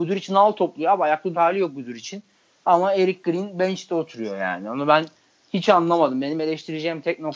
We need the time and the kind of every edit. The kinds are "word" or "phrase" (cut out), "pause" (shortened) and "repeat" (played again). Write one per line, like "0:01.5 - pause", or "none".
0:01.3 - word